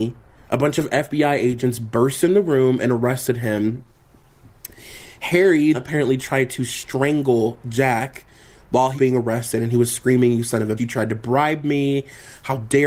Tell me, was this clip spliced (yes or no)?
yes